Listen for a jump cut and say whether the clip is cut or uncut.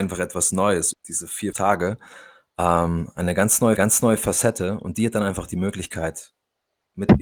cut